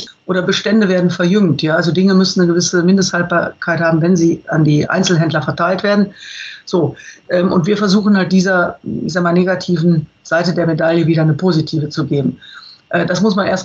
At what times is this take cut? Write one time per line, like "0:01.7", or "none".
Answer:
none